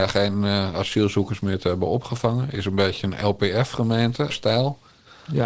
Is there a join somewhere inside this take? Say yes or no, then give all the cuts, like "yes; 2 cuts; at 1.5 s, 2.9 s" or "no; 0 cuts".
yes; 1 cut; at 4.3 s